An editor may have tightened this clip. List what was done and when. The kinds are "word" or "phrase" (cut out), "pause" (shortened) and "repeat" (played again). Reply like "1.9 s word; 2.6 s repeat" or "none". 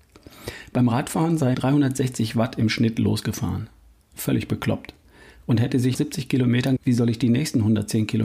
1.5 s word; 5.9 s word; 6.8 s word

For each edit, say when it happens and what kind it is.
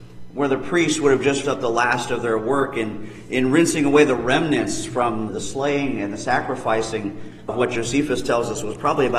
1.4 s word; 5.3 s word; 7.5 s word

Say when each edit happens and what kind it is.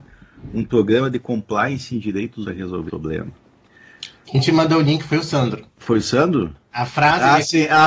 2.4 s word; 2.9 s word; 5.7 s pause

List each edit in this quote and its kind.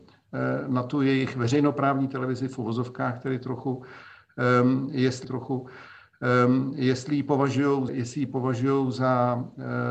5.2 s repeat; 7.9 s word

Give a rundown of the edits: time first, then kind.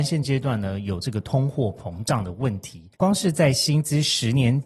2.9 s pause

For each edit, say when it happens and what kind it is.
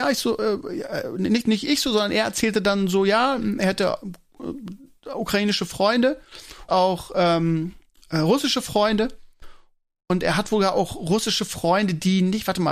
6.7 s word

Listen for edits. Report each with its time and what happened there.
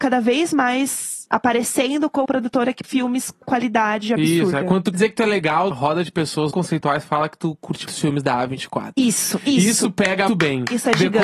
1.3 s word; 2.2 s word; 2.8 s word; 3.4 s word; 4.9 s word; 5.7 s word; 6.5 s word; 7.9 s word; 10.3 s word

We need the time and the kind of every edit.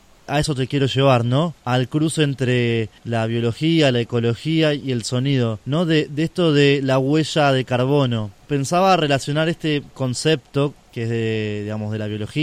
1.6 s pause; 3.0 s pause; 5.6 s pause

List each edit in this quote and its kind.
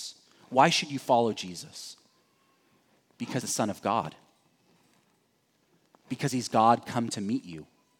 3.4 s word

